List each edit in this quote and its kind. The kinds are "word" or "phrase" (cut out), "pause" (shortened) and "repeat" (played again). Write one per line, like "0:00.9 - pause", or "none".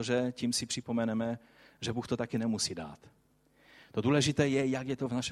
none